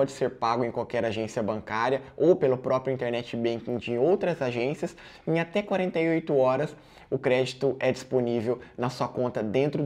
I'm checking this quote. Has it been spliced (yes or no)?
no